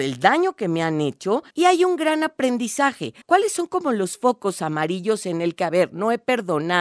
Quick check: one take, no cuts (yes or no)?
no